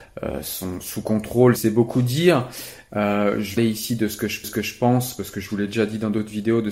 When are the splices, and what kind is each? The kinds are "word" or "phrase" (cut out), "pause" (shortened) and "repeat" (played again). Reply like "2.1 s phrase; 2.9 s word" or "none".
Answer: 1.6 s word; 3.6 s phrase; 4.4 s repeat